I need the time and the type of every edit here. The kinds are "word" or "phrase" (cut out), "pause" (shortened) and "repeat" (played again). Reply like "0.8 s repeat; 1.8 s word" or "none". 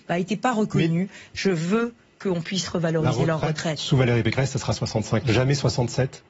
5.2 s word